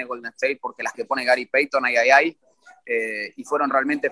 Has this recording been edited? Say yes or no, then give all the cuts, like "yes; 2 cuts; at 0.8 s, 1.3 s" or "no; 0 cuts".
yes; 1 cut; at 0.9 s